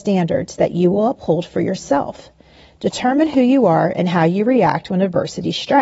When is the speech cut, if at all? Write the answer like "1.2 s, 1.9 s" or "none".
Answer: none